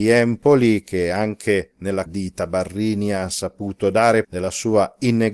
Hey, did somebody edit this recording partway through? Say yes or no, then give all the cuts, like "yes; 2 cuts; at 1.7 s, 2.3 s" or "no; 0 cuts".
yes; 2 cuts; at 2.1 s, 4.2 s